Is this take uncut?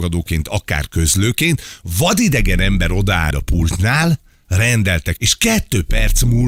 no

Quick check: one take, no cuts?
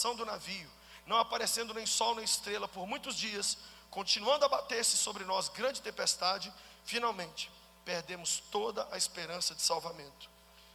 yes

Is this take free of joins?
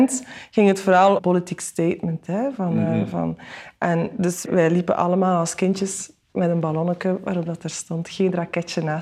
no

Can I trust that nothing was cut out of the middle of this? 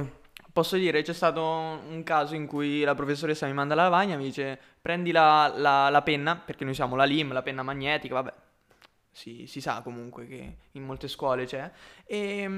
yes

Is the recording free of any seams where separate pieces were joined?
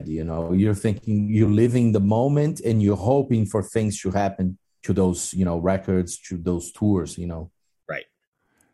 yes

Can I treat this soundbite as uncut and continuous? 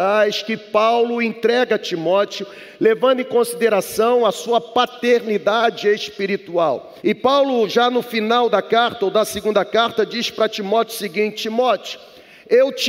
no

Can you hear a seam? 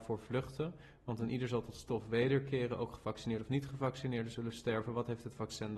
no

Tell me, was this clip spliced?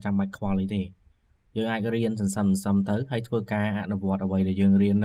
no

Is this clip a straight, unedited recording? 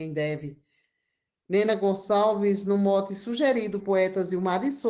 no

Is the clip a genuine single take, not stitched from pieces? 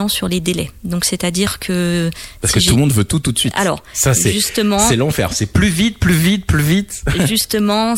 yes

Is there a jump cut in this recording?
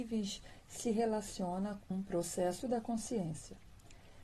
yes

